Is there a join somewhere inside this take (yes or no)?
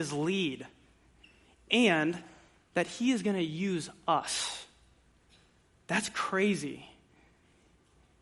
no